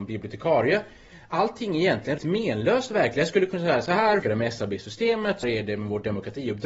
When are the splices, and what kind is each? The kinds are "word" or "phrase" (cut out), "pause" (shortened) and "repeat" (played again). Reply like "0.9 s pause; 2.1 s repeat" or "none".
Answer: 2.2 s word; 4.2 s word; 5.4 s word